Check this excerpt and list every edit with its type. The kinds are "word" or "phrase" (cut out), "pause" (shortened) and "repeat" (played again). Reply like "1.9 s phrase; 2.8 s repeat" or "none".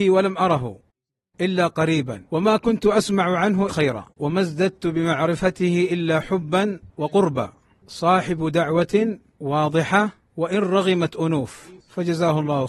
2.3 s pause; 3.7 s word; 4.1 s pause; 6.9 s pause; 9.4 s word